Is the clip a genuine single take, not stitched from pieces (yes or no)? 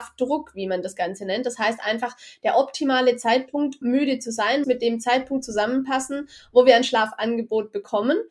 no